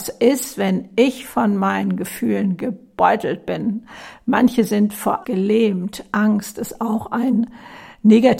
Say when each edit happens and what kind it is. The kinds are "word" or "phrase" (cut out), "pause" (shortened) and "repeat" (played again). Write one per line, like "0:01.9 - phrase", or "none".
0:05.2 - word